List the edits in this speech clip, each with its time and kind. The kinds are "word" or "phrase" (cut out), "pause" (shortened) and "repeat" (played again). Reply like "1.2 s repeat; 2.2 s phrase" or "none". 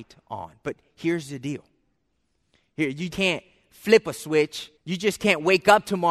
3.1 s word; 4.8 s pause